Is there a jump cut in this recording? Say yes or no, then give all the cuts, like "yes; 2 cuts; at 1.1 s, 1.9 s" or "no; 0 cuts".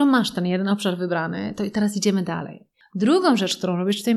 no; 0 cuts